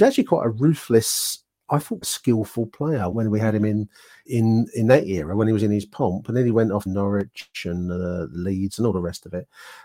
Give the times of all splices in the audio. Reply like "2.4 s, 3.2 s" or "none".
2.0 s, 3.1 s, 4.3 s, 6.9 s